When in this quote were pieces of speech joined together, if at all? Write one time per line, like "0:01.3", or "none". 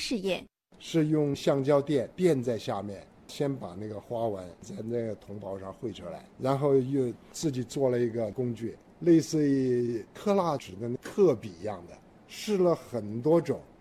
none